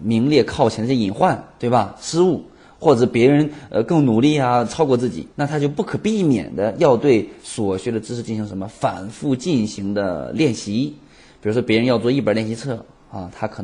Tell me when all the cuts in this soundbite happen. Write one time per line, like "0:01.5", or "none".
0:05.3